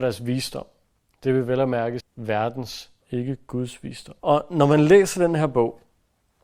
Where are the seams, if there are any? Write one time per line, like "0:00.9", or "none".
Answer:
0:02.0
0:03.0
0:04.2

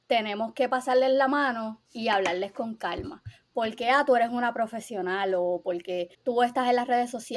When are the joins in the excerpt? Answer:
0:01.8
0:06.1

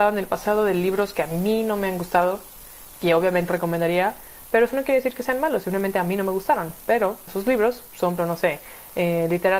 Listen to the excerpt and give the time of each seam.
0:03.5
0:07.3
0:08.2

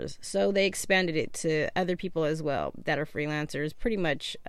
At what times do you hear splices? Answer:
none

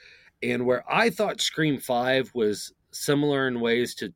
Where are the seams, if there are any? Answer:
0:02.8

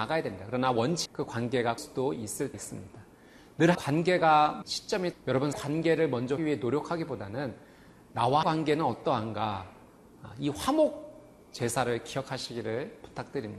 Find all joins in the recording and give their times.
0:01.1
0:01.8
0:02.5
0:03.7
0:04.6
0:05.1
0:05.5
0:06.4
0:08.4

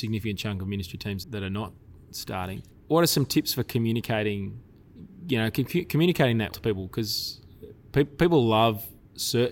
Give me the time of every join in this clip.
0:01.2
0:06.5

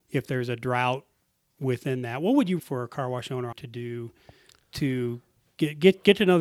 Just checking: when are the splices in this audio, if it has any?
0:01.5
0:02.6
0:03.5

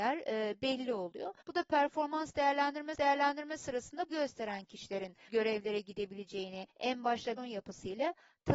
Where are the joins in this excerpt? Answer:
0:01.4
0:03.0
0:04.1
0:05.3
0:06.7
0:07.4

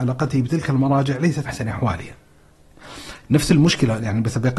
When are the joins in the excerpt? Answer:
0:01.5
0:03.2

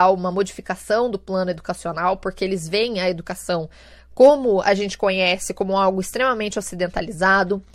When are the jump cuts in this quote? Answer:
none

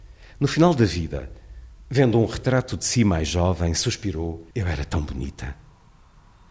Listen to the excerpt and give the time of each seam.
0:04.5

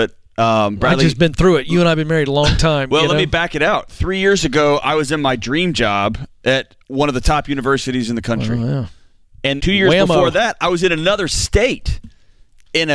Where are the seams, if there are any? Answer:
0:06.8
0:09.6

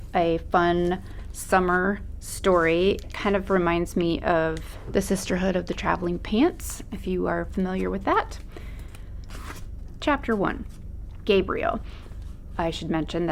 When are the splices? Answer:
0:03.0

